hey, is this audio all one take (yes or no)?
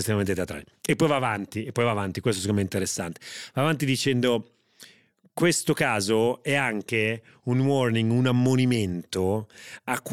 yes